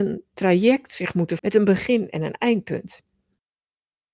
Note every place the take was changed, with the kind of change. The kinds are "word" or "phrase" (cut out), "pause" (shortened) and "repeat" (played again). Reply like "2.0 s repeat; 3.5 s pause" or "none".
1.4 s word